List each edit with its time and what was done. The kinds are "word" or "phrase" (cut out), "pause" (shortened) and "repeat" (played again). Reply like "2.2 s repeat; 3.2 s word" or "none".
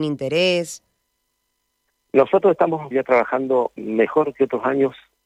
2.9 s word; 3.8 s word

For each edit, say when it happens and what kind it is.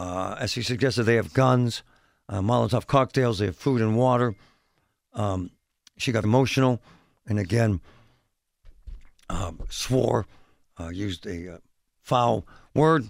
6.2 s word

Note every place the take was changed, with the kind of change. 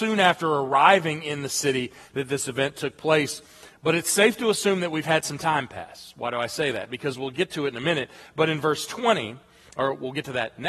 none

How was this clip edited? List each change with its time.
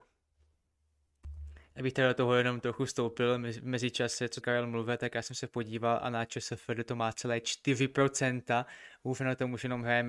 4.4 s word

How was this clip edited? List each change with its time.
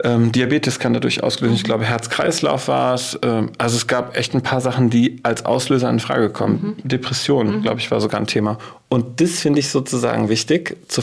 none

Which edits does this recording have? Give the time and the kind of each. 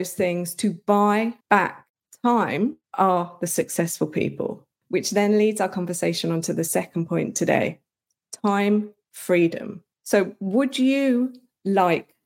1.4 s pause; 2.8 s pause

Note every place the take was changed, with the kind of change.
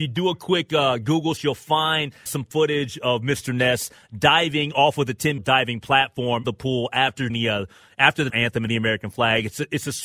1.4 s word; 2.3 s word; 5.4 s word; 6.4 s word; 7.3 s word; 8.3 s word; 8.7 s word

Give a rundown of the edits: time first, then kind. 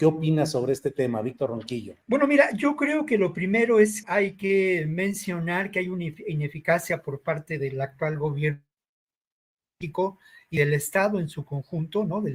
2.0 s pause; 4.0 s word

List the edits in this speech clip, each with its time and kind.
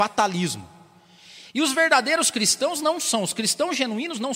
none

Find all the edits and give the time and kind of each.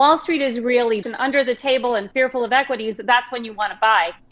1.0 s word

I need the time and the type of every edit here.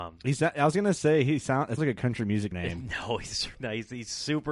1.8 s word; 2.5 s word; 3.5 s word

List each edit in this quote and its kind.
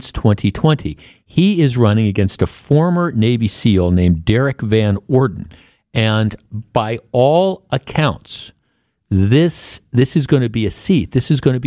none

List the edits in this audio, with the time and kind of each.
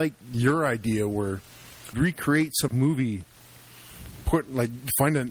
1.9 s phrase; 2.7 s phrase

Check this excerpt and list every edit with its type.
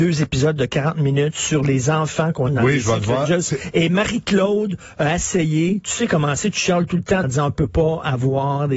2.5 s word; 7.2 s word

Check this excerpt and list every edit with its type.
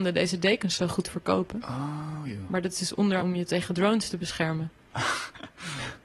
3.2 s word

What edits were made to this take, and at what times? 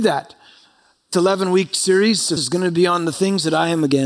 1.1 s word; 2.4 s word

